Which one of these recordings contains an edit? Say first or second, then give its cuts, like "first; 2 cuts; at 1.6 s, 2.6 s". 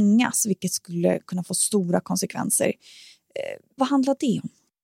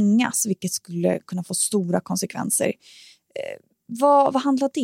first; 1 cut; at 3.8 s